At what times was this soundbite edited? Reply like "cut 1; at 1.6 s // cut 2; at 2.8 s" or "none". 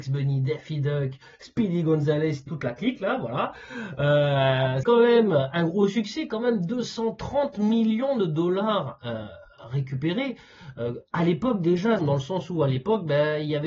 cut 1; at 2.5 s // cut 2; at 4.8 s // cut 3; at 12.0 s